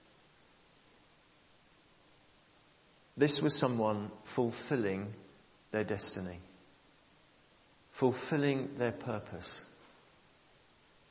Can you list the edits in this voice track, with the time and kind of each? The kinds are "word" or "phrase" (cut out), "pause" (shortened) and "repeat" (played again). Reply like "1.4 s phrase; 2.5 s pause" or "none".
none